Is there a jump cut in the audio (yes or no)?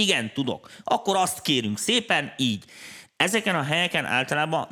no